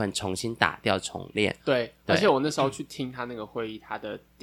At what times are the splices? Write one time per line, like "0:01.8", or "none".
0:01.6